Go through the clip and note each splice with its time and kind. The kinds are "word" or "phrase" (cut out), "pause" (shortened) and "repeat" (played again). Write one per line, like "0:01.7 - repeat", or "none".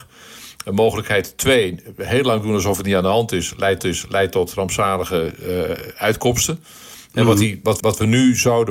0:03.8 - repeat
0:07.8 - repeat